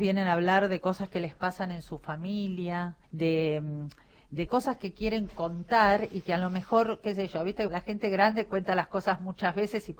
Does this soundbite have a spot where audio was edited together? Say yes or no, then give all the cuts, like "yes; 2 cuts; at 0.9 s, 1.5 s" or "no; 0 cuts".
yes; 3 cuts; at 3.0 s, 4.5 s, 7.7 s